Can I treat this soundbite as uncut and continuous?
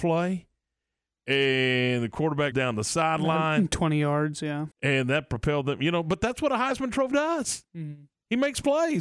no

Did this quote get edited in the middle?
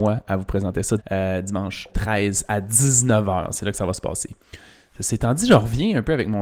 yes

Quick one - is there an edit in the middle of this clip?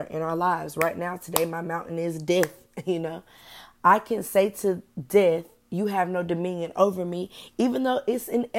no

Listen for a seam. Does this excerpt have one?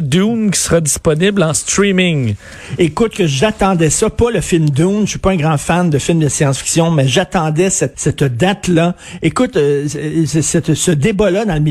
yes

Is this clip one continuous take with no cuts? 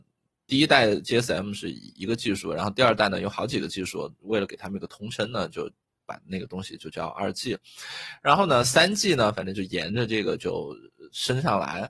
yes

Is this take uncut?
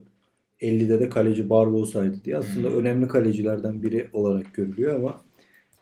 yes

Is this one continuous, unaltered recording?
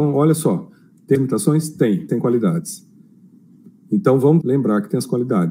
no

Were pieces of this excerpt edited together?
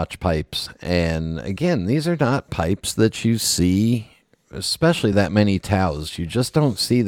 no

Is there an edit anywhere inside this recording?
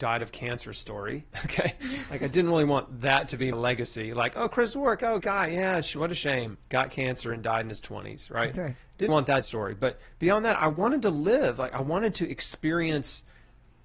yes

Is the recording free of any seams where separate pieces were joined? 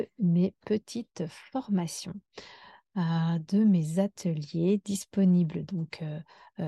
yes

